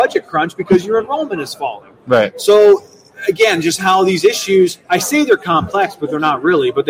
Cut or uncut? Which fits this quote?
cut